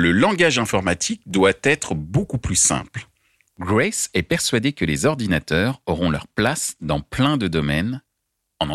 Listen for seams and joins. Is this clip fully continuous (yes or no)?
yes